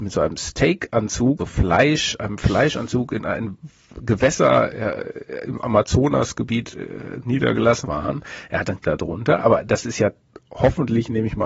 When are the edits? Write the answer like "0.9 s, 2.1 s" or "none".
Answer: 1.4 s, 7.8 s, 8.8 s